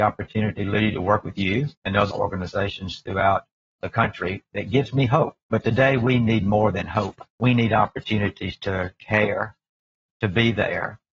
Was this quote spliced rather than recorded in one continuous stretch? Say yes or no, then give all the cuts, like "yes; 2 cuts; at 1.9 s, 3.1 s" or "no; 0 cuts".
yes; 4 cuts; at 1.7 s, 2.1 s, 5.4 s, 7.3 s